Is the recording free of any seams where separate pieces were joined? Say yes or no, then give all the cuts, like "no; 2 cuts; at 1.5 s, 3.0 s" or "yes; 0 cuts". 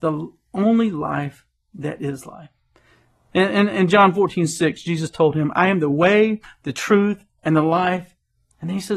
yes; 0 cuts